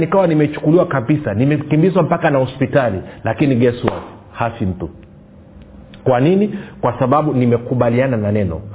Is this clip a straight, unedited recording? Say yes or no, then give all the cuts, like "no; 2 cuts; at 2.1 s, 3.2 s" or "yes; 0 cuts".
yes; 0 cuts